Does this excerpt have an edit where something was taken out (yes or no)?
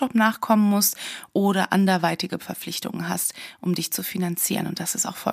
no